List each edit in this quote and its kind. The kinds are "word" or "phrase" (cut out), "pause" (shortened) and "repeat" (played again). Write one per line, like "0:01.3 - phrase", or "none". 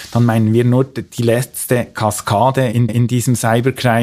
0:02.9 - repeat